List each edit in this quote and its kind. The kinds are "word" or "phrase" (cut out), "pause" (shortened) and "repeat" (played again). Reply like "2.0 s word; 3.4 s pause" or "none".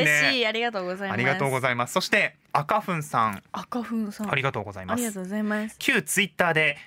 2.4 s pause; 5.8 s word

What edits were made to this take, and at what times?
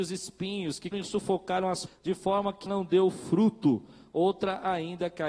0.9 s word; 1.9 s word; 2.7 s word

